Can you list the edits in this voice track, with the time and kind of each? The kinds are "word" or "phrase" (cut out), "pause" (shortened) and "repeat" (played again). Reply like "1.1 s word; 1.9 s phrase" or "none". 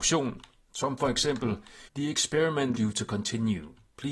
1.9 s pause; 2.8 s word